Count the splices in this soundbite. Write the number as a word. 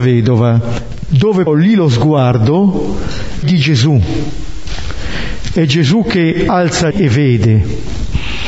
three